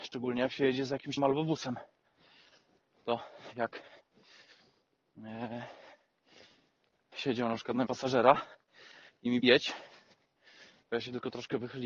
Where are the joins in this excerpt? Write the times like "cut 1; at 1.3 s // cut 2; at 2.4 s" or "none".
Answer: cut 1; at 1.2 s // cut 2; at 7.1 s // cut 3; at 7.9 s // cut 4; at 9.4 s